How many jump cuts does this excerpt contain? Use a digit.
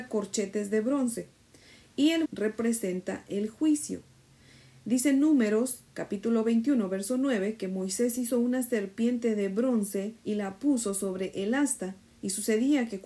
2